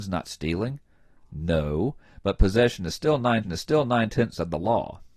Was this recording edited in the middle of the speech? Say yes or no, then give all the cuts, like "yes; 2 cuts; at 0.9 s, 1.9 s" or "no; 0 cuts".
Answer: yes; 1 cut; at 3.4 s